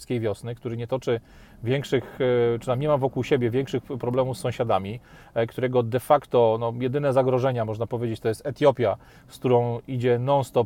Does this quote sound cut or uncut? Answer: uncut